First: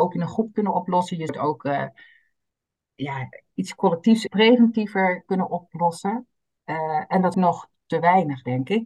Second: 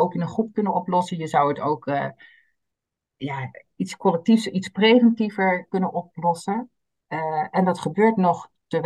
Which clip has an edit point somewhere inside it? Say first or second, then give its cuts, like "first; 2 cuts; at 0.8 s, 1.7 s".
first; 3 cuts; at 1.3 s, 4.3 s, 7.3 s